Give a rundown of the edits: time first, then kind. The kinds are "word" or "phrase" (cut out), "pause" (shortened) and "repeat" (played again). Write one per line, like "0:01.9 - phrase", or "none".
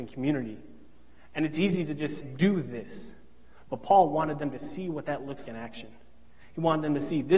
0:02.2 - word
0:05.5 - word